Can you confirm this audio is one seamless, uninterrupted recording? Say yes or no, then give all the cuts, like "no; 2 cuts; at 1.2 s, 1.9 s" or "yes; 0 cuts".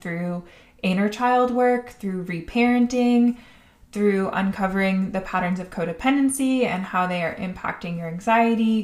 yes; 0 cuts